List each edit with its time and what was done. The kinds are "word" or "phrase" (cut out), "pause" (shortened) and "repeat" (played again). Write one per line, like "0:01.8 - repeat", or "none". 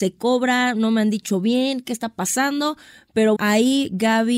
0:03.4 - word